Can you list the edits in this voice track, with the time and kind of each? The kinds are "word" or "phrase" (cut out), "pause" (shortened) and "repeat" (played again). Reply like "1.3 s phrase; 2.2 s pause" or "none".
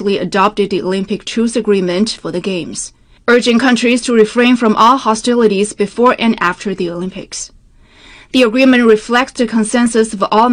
none